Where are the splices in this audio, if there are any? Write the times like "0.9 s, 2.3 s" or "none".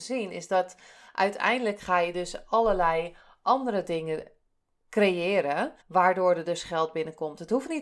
5.8 s